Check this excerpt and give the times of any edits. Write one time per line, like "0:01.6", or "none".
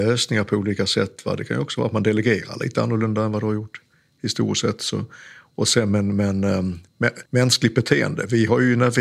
0:07.3